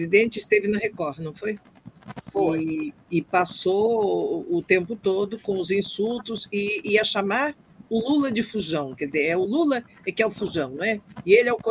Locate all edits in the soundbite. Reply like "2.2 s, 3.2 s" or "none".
none